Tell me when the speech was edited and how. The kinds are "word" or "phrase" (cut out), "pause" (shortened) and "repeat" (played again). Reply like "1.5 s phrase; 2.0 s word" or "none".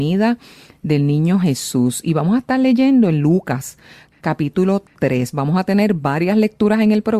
none